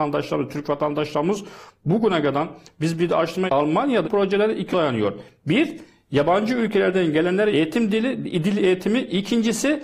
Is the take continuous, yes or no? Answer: no